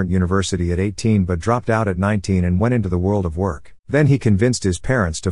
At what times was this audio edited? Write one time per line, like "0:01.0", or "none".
0:03.8